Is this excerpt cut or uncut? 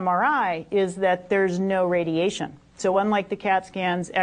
uncut